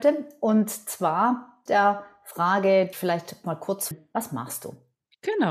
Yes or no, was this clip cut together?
yes